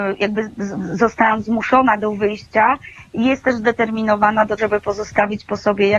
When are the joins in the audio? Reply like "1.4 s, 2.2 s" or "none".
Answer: 4.6 s